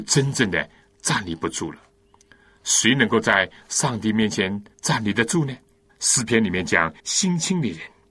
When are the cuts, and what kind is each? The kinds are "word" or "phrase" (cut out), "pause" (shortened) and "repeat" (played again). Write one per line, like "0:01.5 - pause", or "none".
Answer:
0:04.7 - pause
0:05.9 - pause
0:07.0 - phrase